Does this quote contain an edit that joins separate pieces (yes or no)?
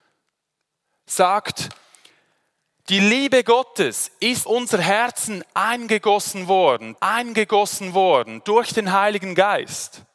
yes